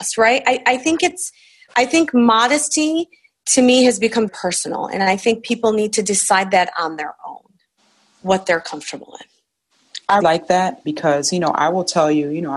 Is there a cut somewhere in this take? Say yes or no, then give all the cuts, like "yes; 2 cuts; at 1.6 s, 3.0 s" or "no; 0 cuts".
yes; 3 cuts; at 4.3 s, 10.2 s, 10.8 s